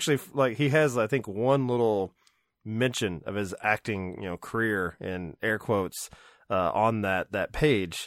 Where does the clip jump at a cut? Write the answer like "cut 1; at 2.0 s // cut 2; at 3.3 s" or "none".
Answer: none